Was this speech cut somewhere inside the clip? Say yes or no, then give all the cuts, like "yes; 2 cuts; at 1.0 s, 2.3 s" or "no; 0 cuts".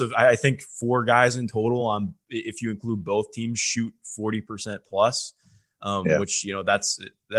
no; 0 cuts